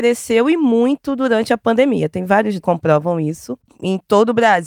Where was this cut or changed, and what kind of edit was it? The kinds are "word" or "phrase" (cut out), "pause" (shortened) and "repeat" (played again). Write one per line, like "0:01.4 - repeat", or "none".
0:02.6 - phrase